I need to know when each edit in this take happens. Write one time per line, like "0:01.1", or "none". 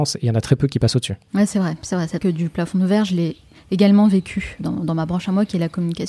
0:02.2
0:04.6